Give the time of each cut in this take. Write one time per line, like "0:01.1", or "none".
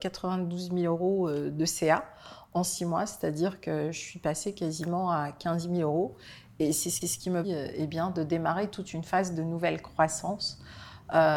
0:07.0
0:07.4